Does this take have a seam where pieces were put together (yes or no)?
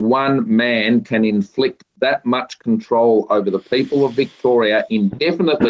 no